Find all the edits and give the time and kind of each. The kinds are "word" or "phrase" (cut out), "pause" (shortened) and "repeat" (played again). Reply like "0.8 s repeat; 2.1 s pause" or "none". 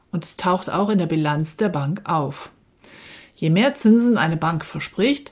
none